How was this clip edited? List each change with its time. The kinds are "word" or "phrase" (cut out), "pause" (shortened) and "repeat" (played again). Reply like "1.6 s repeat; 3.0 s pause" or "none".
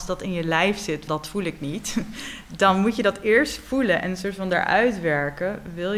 1.1 s word